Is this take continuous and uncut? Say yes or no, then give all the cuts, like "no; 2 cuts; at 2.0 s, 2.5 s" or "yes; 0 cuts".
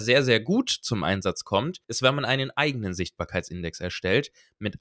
no; 1 cut; at 1.8 s